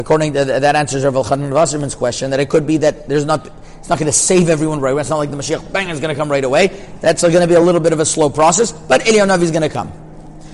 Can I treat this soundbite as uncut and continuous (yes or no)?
yes